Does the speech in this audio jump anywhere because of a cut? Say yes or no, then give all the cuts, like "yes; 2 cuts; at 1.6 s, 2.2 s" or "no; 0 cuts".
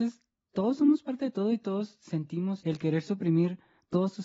yes; 1 cut; at 2.6 s